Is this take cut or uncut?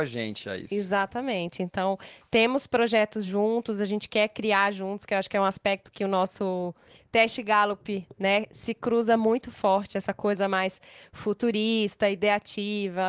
uncut